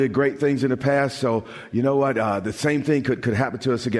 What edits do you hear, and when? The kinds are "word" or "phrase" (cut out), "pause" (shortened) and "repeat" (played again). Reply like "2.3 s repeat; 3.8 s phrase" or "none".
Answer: none